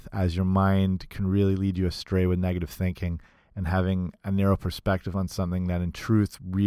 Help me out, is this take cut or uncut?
uncut